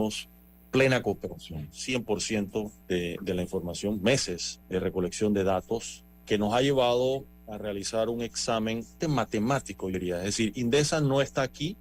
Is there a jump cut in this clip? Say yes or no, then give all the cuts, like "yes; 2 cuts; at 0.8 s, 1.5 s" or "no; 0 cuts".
yes; 5 cuts; at 2.8 s, 4.6 s, 6.2 s, 9.0 s, 9.9 s